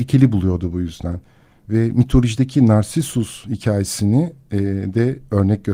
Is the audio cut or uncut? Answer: uncut